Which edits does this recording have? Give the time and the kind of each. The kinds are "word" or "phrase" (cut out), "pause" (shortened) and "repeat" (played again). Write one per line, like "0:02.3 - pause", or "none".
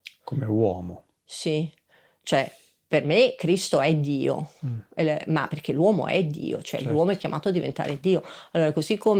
none